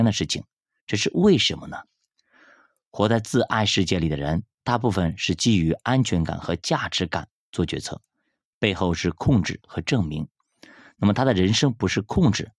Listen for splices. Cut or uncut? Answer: uncut